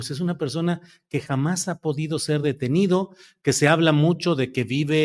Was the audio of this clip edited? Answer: no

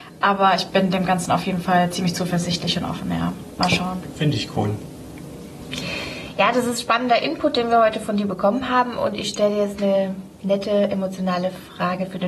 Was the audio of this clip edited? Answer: yes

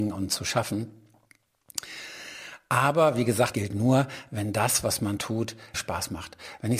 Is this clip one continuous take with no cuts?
no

